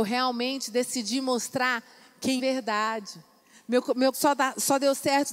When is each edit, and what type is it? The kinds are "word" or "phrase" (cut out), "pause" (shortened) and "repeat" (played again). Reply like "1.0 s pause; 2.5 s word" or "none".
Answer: 2.4 s phrase; 3.4 s pause; 4.1 s word